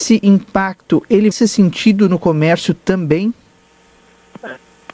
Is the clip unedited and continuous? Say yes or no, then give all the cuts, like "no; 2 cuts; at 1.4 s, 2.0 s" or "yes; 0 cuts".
no; 1 cut; at 1.3 s